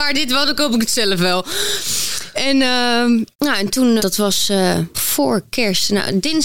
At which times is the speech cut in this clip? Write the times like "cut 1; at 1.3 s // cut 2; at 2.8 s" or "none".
cut 1; at 3.3 s // cut 2; at 4.0 s // cut 3; at 4.9 s